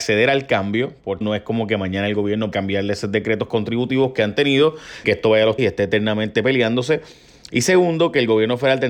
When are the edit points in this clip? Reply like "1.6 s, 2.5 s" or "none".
1.2 s, 2.5 s, 5.0 s, 5.6 s